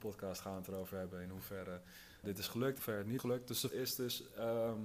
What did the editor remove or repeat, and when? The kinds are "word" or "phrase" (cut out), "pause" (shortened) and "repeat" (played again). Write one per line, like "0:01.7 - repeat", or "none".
0:02.2 - word
0:02.8 - phrase
0:03.2 - word
0:03.7 - phrase